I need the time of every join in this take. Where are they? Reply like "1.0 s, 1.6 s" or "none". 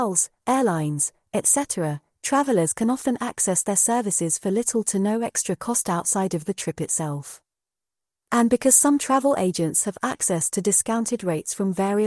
none